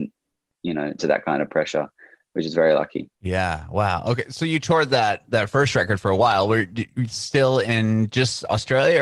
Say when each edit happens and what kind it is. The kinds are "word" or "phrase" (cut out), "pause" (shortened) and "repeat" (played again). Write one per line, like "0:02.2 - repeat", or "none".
0:01.0 - phrase
0:03.1 - pause